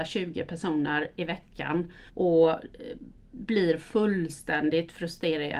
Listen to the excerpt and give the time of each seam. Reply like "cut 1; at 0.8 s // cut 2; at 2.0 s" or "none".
cut 1; at 2.1 s